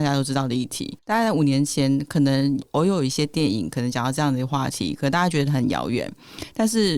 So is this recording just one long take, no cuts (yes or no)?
no